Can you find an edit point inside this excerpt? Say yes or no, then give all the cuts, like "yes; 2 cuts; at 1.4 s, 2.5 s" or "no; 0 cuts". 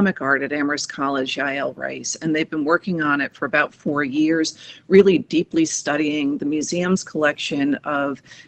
no; 0 cuts